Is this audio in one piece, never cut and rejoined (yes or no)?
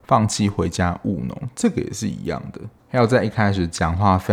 no